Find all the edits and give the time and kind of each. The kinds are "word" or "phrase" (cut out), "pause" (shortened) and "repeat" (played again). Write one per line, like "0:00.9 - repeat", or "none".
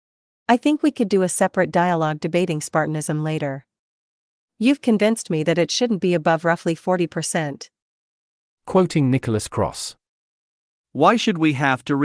none